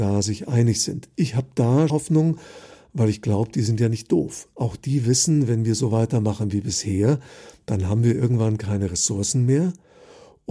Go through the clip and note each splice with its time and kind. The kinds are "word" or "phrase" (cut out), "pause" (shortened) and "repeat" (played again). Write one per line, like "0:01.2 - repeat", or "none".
0:01.9 - word